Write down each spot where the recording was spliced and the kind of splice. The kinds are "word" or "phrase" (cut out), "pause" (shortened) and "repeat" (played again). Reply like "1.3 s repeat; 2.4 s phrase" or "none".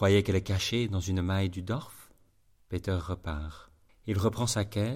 2.3 s pause; 3.9 s pause